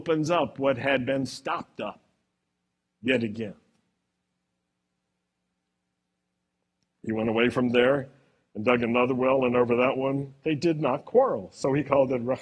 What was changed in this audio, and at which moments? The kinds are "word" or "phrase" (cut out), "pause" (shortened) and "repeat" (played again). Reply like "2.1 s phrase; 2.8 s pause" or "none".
none